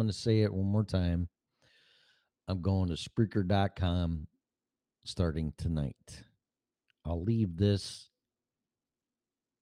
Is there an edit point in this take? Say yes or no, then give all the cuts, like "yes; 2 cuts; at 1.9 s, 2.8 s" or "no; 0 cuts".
no; 0 cuts